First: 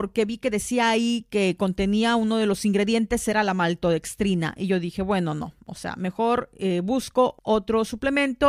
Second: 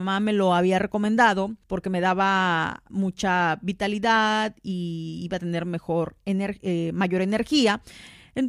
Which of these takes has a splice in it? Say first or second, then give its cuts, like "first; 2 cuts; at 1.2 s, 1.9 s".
second; 1 cut; at 1.6 s